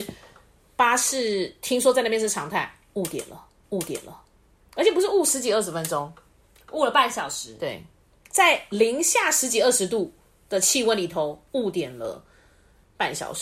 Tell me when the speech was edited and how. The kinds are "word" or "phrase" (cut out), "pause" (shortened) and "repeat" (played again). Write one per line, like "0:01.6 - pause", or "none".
0:03.6 - repeat